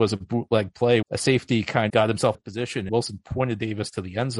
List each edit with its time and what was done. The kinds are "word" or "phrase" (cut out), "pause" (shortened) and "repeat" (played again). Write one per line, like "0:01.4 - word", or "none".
0:01.0 - word
0:01.9 - word
0:02.3 - word
0:02.9 - word

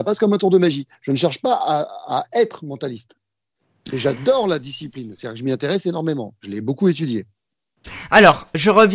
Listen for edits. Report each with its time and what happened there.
none

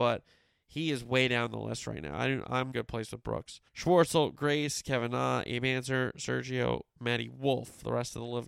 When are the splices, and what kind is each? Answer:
0:02.7 - phrase
0:03.7 - pause

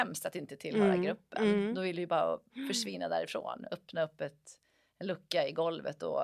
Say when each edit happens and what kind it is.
none

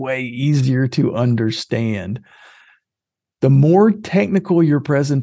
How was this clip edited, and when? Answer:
none

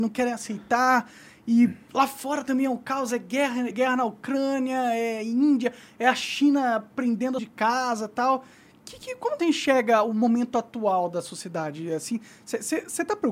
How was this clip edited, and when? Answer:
0:03.7 - word
0:07.4 - phrase
0:09.4 - word

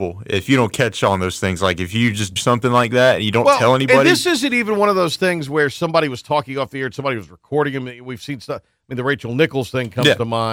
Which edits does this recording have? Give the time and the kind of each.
0:02.4 - word

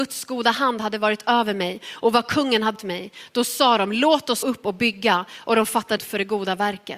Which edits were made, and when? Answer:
0:02.8 - word
0:04.4 - word
0:06.0 - word

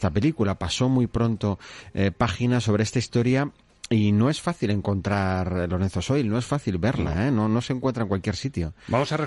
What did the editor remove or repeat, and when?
none

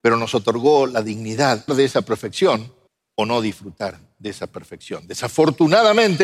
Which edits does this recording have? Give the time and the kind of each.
0:01.7 - phrase
0:02.9 - pause

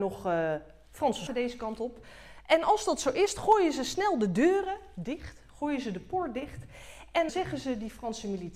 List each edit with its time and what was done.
0:01.3 - word
0:07.3 - word

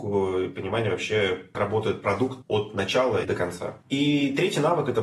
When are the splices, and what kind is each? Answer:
0:01.5 - word
0:02.4 - word
0:03.2 - word
0:03.8 - pause

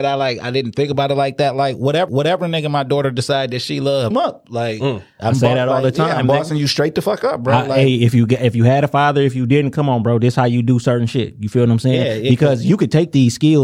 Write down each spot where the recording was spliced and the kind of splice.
0:02.1 - repeat
0:04.1 - phrase

